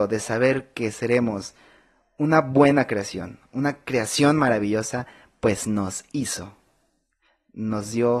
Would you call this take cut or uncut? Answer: uncut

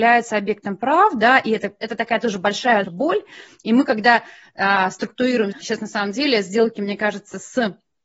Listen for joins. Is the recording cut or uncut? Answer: cut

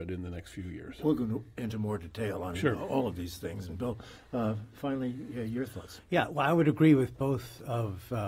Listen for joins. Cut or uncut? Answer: uncut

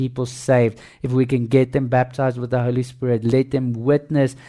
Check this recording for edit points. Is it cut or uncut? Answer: uncut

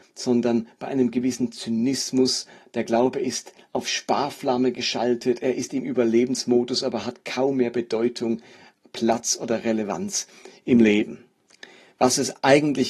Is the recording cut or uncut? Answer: uncut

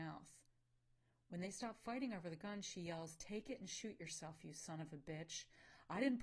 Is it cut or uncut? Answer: uncut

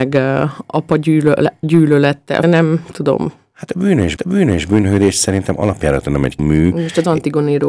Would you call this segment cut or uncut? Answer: cut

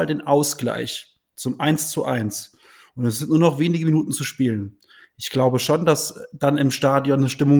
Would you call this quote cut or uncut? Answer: uncut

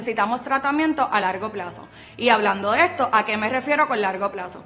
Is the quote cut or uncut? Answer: uncut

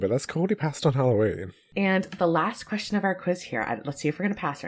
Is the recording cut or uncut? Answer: uncut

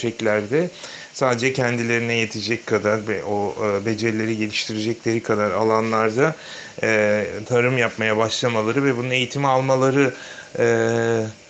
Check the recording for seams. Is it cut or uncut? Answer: uncut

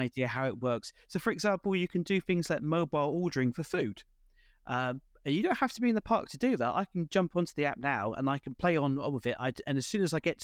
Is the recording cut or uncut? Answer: uncut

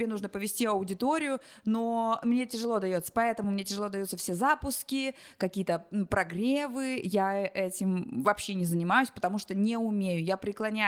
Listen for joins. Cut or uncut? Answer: uncut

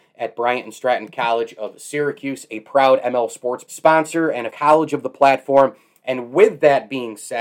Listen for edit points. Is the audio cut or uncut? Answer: cut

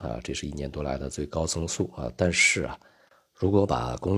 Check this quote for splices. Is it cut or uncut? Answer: uncut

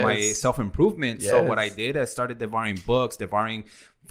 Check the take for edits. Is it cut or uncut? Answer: uncut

